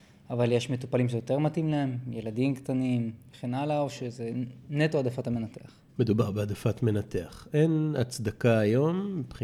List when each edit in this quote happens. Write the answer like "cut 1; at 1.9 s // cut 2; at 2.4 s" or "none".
cut 1; at 5.9 s